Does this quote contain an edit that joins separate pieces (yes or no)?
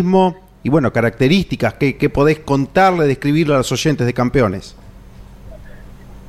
no